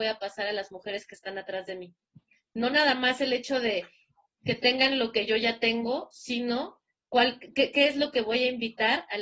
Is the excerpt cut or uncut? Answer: uncut